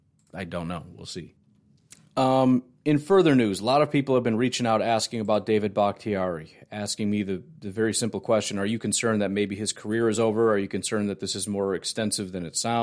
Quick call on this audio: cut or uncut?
uncut